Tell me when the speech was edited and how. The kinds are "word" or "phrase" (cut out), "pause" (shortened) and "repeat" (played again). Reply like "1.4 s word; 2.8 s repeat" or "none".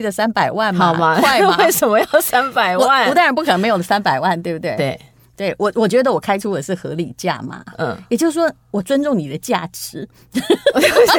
none